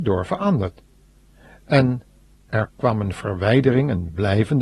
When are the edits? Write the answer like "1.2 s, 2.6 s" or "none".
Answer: none